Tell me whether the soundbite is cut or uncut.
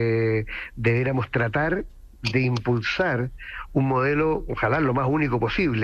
uncut